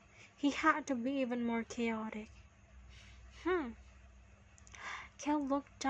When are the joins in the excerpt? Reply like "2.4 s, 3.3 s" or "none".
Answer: none

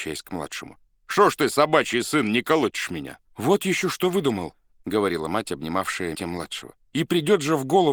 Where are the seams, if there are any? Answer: 3.3 s, 6.1 s, 6.8 s

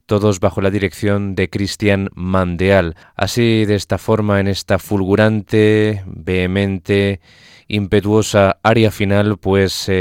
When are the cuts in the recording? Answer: 3.0 s

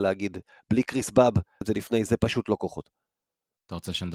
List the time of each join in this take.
1.6 s, 2.1 s

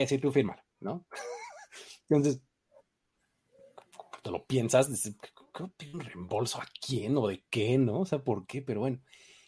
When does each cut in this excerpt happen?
none

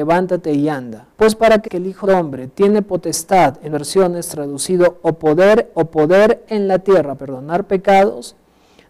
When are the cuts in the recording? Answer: 1.1 s, 1.7 s, 2.0 s, 3.7 s, 5.7 s, 7.2 s

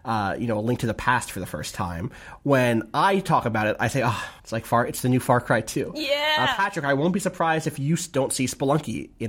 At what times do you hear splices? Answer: 4.4 s

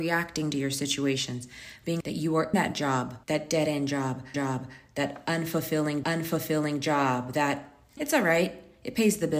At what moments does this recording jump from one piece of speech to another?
2.0 s, 2.5 s, 3.2 s, 4.3 s, 6.0 s, 8.0 s

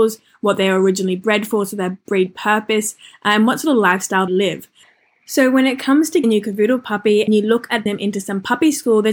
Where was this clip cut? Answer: 4.3 s, 6.2 s, 7.3 s, 7.9 s

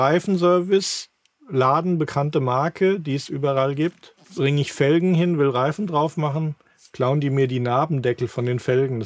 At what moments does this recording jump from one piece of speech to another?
4.2 s

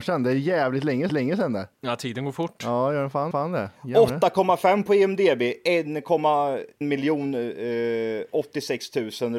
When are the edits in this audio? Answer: 1.1 s, 1.7 s, 3.3 s, 6.8 s

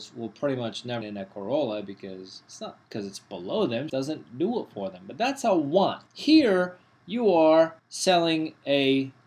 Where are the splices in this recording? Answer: 1.0 s, 2.8 s, 3.9 s, 6.1 s, 7.8 s

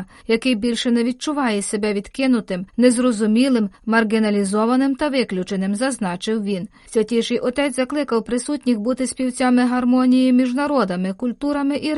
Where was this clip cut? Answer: none

